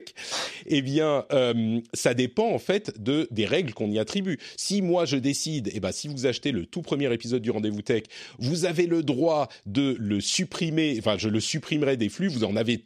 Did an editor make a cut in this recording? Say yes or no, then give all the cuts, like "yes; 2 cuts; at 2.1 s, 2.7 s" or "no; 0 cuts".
no; 0 cuts